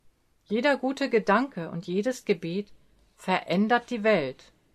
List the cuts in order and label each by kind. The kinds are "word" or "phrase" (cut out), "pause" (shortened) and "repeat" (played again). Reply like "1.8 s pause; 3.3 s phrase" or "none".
none